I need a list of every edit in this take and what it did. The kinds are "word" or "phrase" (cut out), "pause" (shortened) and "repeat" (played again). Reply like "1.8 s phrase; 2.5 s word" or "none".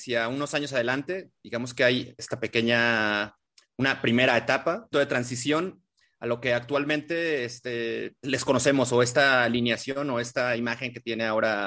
2.2 s word; 4.9 s phrase; 8.2 s word